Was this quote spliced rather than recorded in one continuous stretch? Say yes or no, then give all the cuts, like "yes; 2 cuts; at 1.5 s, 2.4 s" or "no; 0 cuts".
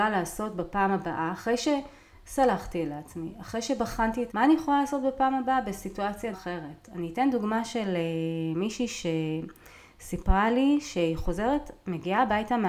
yes; 2 cuts; at 4.3 s, 6.3 s